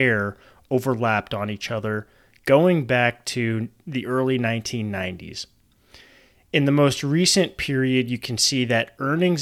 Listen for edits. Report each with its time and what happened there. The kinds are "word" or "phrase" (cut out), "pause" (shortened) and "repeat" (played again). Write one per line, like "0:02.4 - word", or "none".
none